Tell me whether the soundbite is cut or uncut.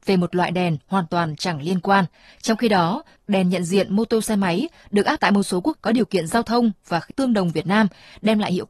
cut